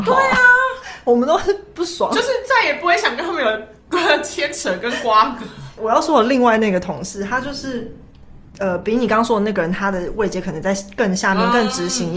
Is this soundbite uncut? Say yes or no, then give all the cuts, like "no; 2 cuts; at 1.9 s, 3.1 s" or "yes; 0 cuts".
yes; 0 cuts